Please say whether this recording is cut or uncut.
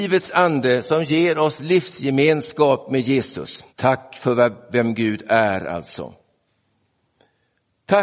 cut